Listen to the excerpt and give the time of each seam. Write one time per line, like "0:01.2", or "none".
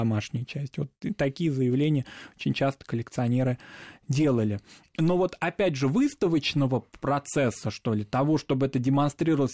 none